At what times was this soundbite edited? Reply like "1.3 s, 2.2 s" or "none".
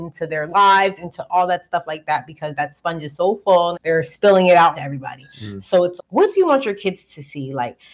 3.7 s, 4.7 s, 6.0 s